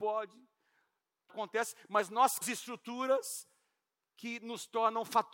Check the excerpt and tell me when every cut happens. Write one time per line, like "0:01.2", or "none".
0:01.3
0:02.4